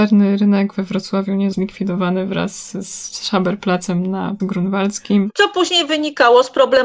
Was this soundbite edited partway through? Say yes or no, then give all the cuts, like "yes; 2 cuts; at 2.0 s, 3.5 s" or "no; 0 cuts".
yes; 2 cuts; at 1.5 s, 4.4 s